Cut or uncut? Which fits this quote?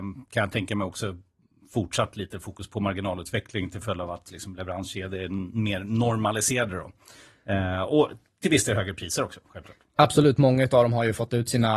uncut